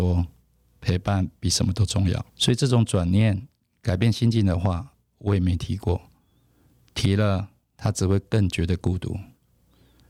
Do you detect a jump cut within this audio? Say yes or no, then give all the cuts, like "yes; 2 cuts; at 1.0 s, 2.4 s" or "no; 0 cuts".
yes; 1 cut; at 2.3 s